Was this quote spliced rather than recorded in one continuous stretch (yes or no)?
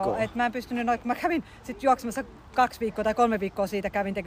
no